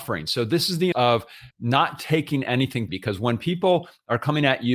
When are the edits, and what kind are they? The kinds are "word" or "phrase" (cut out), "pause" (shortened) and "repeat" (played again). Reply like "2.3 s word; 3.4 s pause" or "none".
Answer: 0.9 s word; 1.5 s pause; 2.9 s word